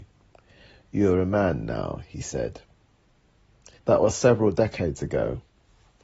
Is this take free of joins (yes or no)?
no